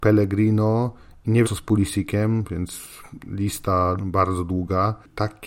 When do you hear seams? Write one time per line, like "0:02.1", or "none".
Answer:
0:01.4
0:04.0